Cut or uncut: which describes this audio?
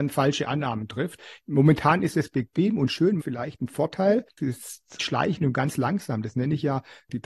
cut